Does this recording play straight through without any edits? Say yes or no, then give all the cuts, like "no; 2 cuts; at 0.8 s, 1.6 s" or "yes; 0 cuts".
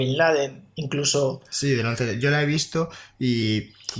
yes; 0 cuts